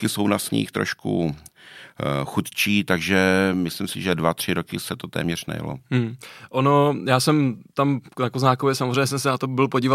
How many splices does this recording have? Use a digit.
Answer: 0